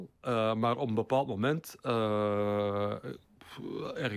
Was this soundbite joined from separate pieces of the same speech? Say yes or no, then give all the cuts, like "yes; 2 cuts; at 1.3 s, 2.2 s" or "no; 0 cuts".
no; 0 cuts